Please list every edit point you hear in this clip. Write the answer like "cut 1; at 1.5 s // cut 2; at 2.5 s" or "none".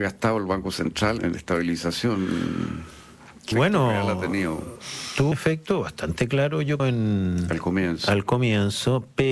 cut 1; at 1.2 s // cut 2; at 3.5 s // cut 3; at 5.3 s // cut 4; at 6.8 s